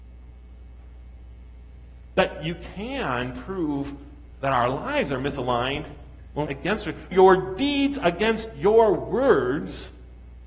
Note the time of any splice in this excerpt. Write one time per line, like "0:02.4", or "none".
0:06.5
0:07.1